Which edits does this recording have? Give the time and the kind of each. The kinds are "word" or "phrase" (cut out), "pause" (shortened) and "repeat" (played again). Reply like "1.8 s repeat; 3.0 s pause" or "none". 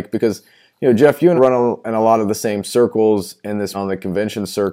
1.4 s word; 3.7 s word